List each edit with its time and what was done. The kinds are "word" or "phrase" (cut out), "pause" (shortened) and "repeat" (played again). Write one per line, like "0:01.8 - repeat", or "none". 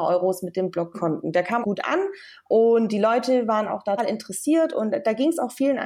0:00.9 - word
0:01.6 - word
0:04.0 - word